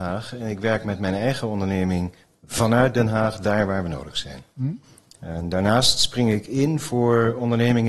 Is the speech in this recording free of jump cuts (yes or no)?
yes